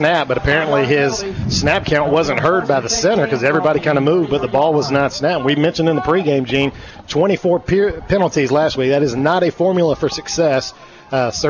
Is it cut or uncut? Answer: uncut